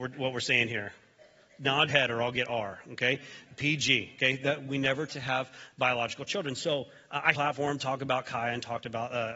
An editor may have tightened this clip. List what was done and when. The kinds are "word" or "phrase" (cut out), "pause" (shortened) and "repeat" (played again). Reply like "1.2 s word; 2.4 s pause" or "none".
1.9 s word; 5.1 s word; 7.3 s phrase